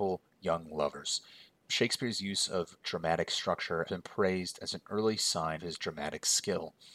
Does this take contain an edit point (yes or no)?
yes